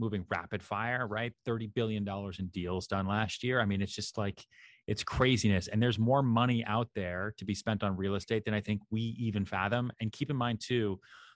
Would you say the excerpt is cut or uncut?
uncut